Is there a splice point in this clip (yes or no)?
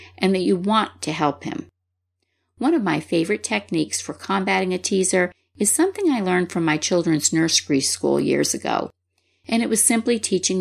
no